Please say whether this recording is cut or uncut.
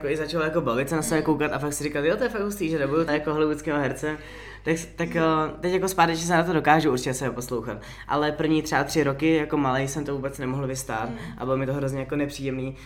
cut